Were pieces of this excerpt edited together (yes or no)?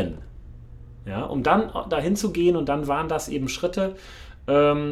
no